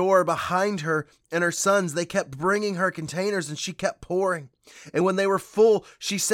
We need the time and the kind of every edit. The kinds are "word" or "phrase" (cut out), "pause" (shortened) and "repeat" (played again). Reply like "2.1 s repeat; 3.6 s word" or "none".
none